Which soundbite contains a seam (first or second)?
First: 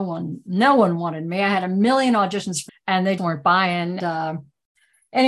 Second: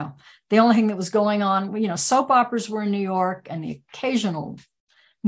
first